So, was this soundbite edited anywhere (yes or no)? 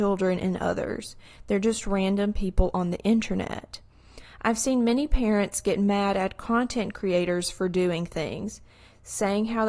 no